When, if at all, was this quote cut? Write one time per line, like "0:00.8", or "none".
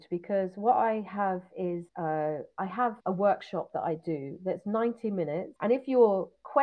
0:01.9
0:03.0
0:05.6